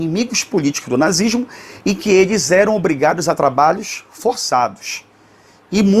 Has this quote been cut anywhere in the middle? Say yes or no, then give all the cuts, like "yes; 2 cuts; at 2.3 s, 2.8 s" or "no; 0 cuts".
no; 0 cuts